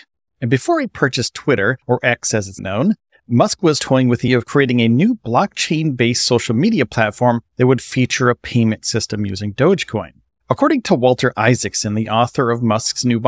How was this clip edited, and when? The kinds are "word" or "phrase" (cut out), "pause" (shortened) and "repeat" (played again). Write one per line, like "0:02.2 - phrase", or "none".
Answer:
0:01.8 - pause
0:02.6 - word
0:04.3 - word
0:07.5 - pause
0:10.3 - pause